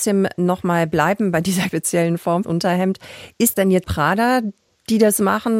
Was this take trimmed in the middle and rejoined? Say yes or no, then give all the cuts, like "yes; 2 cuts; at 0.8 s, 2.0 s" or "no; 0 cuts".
yes; 4 cuts; at 1.7 s, 2.4 s, 3.5 s, 3.8 s